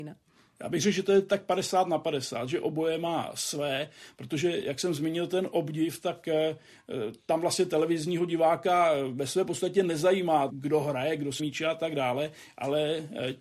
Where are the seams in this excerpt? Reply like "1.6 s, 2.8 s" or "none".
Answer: 10.5 s, 11.4 s